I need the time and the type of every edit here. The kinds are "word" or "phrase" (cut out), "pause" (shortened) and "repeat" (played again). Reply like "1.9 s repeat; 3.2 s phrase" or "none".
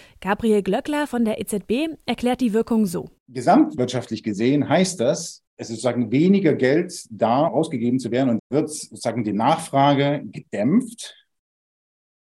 3.2 s pause; 5.5 s pause; 7.5 s word; 8.4 s word